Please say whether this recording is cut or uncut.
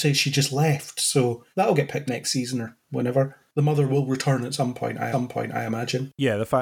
cut